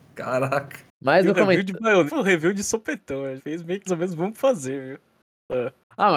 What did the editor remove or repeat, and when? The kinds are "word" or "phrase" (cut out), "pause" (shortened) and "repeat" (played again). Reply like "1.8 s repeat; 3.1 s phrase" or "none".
2.1 s word; 3.4 s word; 3.9 s word

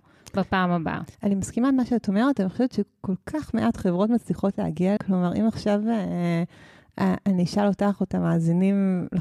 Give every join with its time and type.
1.1 s pause; 5.0 s word

